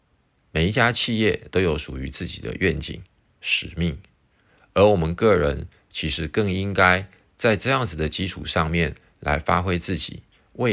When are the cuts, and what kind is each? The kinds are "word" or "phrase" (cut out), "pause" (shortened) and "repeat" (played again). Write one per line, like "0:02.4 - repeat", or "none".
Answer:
none